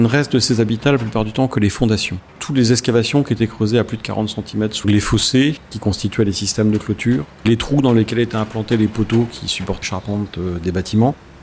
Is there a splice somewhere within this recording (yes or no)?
yes